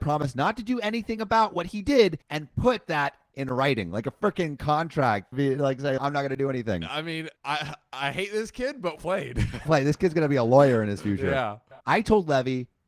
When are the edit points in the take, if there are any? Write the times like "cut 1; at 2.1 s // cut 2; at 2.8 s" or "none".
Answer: cut 1; at 2.2 s // cut 2; at 5.3 s // cut 3; at 6.0 s // cut 4; at 7.4 s // cut 5; at 9.0 s // cut 6; at 9.7 s // cut 7; at 11.8 s